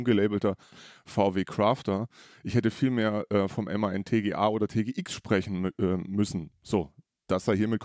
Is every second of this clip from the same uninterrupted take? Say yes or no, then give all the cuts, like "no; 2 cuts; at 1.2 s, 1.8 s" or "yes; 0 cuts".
yes; 0 cuts